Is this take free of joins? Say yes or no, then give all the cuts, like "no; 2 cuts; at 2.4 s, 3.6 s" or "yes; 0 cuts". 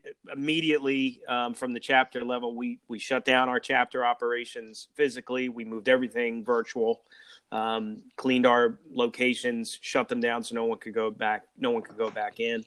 yes; 0 cuts